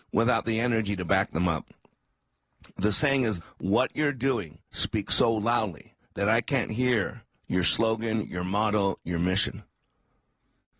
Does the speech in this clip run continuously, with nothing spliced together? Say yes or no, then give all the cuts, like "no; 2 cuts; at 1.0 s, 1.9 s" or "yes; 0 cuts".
no; 3 cuts; at 3.4 s, 4.7 s, 6.0 s